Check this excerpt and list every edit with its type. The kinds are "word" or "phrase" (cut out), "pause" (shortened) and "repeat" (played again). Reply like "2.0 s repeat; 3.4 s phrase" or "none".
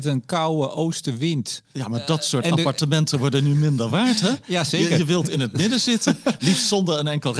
none